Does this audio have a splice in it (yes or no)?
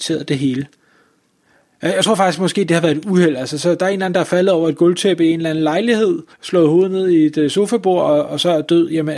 yes